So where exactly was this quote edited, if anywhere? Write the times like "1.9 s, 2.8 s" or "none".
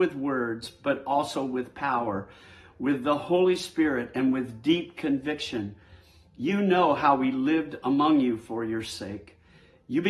none